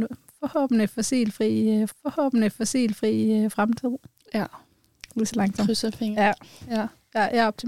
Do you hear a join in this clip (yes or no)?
yes